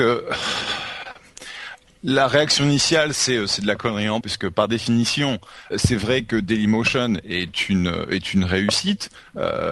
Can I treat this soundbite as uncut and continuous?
no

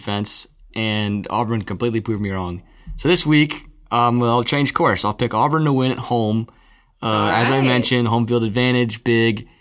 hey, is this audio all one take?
yes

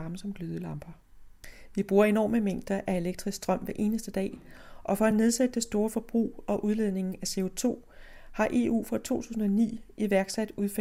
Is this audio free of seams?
yes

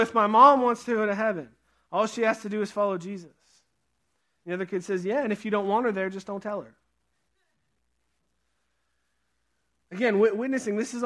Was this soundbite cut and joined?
no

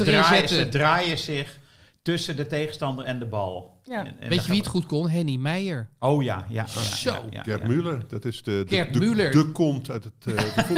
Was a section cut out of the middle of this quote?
no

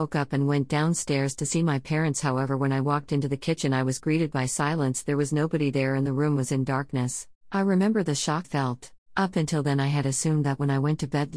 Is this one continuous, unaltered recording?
no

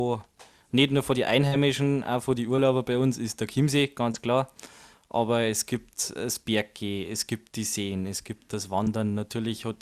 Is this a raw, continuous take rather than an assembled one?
yes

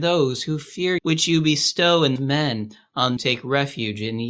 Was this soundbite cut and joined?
yes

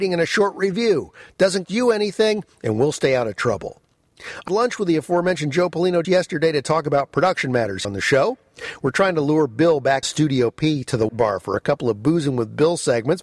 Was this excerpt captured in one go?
no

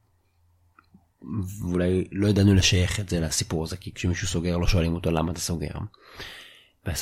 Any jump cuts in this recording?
no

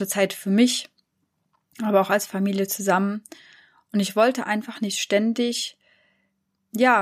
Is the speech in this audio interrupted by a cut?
no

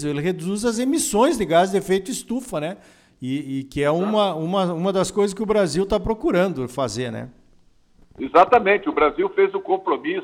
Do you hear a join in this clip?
no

